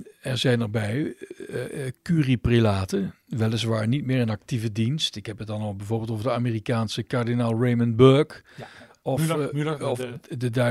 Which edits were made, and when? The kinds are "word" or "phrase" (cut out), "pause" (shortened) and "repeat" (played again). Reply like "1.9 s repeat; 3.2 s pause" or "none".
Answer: none